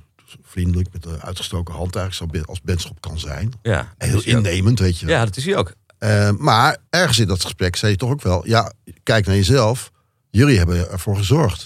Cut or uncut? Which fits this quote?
cut